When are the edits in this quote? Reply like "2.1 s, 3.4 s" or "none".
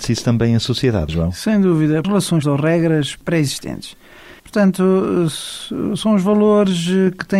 1.1 s, 2.0 s, 2.4 s, 4.4 s